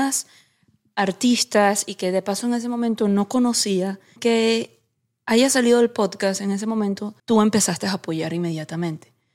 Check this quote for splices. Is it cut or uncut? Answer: cut